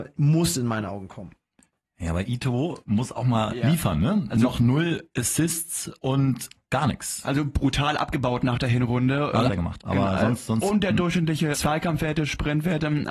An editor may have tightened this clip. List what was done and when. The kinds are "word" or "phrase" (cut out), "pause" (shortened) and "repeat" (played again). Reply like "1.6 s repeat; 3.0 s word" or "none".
6.6 s word; 9.5 s phrase; 11.5 s word